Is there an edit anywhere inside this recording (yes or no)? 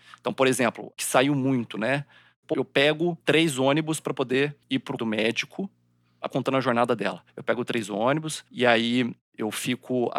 yes